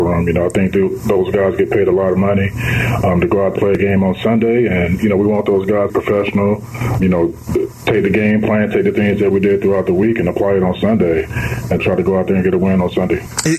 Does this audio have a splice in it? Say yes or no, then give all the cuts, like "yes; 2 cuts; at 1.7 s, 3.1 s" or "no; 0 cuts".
yes; 4 cuts; at 3.6 s, 5.9 s, 7.0 s, 11.8 s